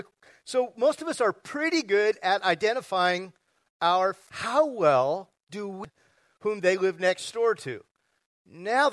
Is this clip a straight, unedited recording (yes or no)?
yes